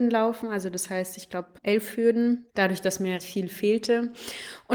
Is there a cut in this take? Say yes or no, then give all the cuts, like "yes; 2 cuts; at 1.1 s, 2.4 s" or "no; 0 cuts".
yes; 3 cuts; at 1.6 s, 2.5 s, 3.2 s